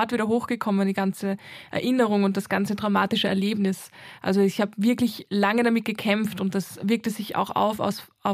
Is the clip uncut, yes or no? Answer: yes